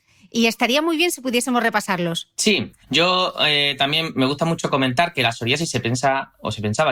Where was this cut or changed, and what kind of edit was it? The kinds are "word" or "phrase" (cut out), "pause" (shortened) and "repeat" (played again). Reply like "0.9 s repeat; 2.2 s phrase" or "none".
2.8 s pause